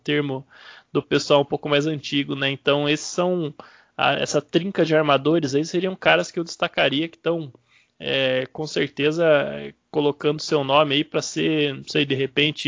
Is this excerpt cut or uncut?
uncut